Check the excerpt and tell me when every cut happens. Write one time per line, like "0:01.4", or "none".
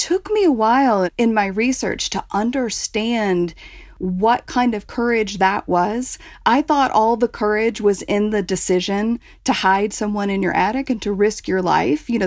none